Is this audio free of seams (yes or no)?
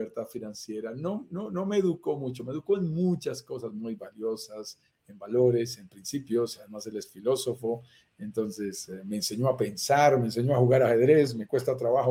yes